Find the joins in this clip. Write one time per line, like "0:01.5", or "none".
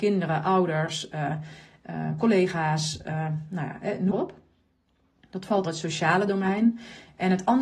0:04.1
0:05.7